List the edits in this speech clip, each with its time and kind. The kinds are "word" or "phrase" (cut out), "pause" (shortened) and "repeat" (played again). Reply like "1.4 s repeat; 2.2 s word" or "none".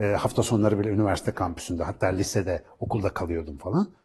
none